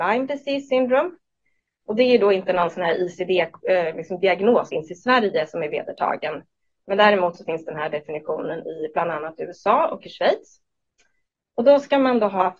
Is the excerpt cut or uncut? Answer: cut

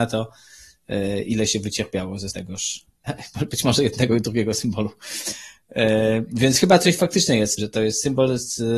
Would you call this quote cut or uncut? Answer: cut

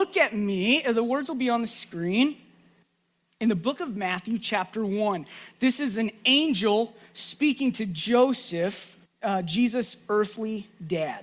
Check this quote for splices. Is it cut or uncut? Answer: cut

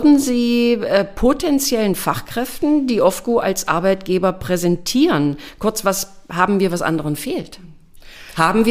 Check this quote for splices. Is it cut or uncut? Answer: uncut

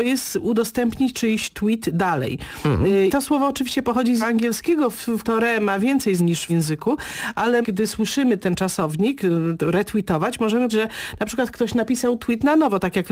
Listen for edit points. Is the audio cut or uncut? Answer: cut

